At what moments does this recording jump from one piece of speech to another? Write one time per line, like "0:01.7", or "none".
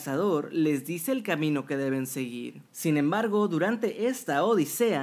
0:02.7